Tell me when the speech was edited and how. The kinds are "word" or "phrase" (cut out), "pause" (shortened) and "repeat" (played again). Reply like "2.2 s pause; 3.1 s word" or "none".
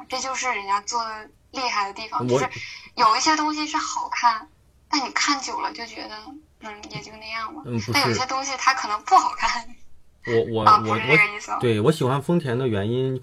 none